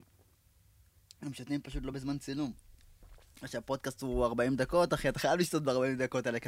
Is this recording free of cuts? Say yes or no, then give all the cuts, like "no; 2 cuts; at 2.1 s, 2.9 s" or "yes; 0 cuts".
yes; 0 cuts